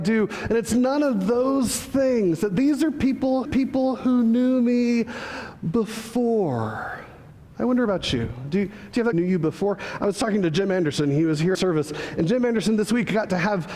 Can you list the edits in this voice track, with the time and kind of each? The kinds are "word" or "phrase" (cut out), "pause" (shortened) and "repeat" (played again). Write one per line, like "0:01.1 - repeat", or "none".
0:03.4 - repeat
0:07.5 - pause
0:09.1 - phrase
0:11.5 - phrase